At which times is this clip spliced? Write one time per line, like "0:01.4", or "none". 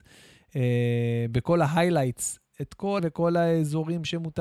0:03.0